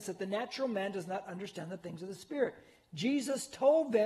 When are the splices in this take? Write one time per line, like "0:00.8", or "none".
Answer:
none